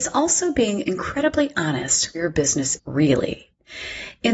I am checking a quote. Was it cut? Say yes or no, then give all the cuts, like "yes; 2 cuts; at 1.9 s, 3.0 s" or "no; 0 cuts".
yes; 2 cuts; at 2.1 s, 2.8 s